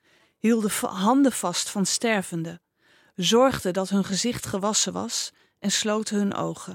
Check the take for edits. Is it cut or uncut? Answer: uncut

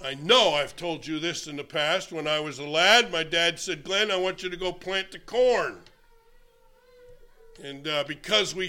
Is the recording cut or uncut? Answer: uncut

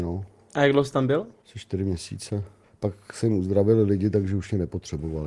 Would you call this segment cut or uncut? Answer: cut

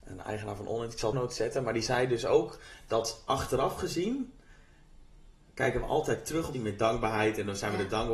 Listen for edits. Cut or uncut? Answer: cut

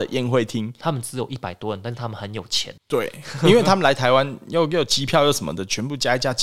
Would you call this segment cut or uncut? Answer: cut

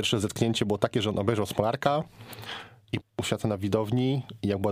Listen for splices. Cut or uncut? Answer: cut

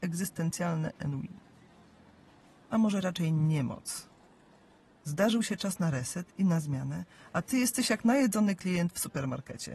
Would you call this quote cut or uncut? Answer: uncut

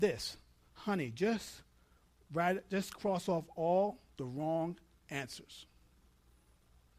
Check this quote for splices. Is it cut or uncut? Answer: uncut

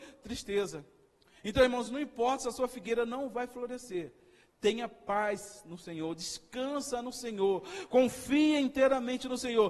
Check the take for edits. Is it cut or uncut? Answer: uncut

